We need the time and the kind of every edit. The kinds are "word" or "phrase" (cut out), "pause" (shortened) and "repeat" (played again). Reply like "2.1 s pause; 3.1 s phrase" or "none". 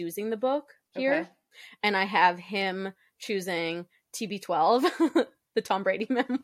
none